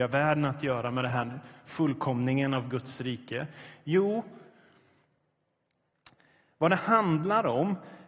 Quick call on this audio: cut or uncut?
uncut